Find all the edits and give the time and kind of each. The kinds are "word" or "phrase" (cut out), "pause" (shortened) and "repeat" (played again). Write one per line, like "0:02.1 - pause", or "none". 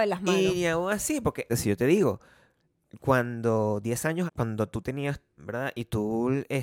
0:01.5 - word
0:04.3 - word
0:05.4 - word